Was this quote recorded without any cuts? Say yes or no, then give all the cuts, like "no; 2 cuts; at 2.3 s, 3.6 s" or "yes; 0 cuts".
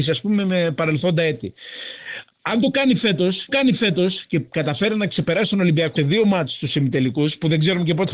no; 2 cuts; at 3.5 s, 6.0 s